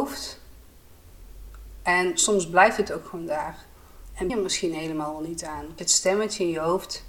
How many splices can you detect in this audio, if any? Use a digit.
2